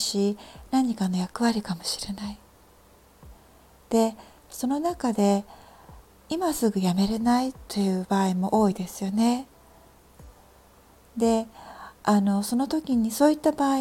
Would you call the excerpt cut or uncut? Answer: uncut